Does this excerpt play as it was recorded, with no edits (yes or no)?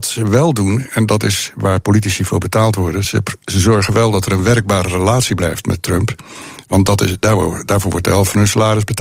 yes